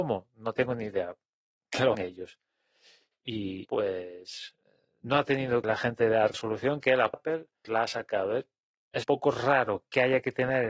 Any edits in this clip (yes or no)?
yes